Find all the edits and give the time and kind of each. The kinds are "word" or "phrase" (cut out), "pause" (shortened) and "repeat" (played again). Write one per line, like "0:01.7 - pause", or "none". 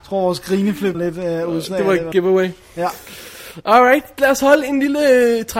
0:00.9 - word
0:02.1 - word
0:04.2 - word

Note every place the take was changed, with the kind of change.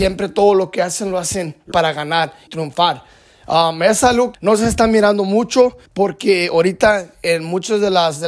0:01.7 - word
0:02.5 - word
0:04.3 - word
0:05.9 - pause

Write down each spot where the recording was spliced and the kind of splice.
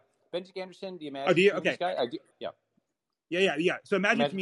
0:02.3 - word

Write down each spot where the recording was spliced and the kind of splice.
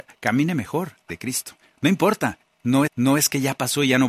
0:01.1 - word
0:01.6 - pause
0:02.9 - repeat

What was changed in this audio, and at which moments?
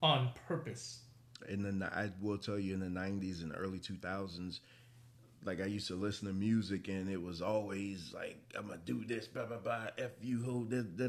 none

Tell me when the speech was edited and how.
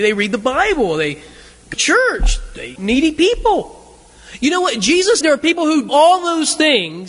0:01.7 - word
0:02.8 - word
0:05.2 - word
0:05.9 - word

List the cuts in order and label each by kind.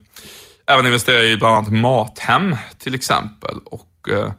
none

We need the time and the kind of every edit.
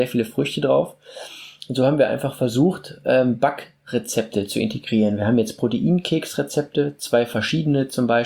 none

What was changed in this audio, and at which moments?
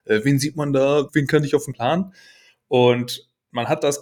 0:01.1 - word
0:01.7 - phrase

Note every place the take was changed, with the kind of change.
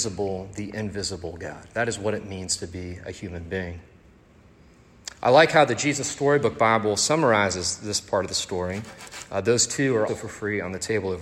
0:10.1 - word

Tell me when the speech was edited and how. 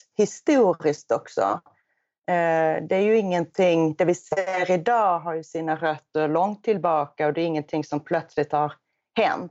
none

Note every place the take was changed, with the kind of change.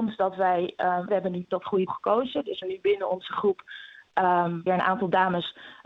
0:01.1 - word
0:01.4 - word
0:01.9 - word
0:02.6 - word
0:04.7 - word

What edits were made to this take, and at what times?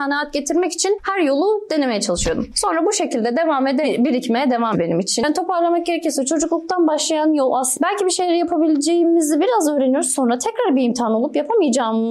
0:03.8 - phrase
0:04.7 - word

